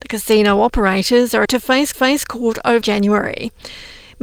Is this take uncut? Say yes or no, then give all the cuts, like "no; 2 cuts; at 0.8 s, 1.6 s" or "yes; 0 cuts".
no; 3 cuts; at 1.4 s, 1.9 s, 2.8 s